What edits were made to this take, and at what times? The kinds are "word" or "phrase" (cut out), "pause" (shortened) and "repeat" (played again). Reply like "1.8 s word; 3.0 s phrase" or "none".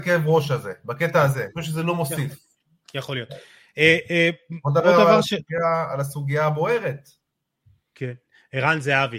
none